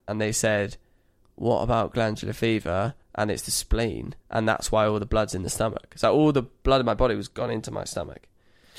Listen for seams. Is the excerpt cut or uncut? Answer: cut